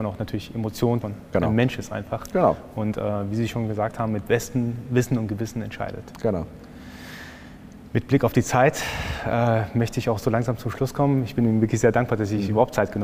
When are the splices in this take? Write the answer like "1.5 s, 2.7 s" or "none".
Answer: 1.0 s